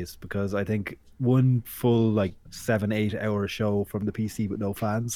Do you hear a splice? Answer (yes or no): yes